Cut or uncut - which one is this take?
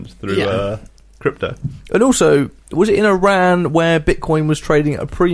cut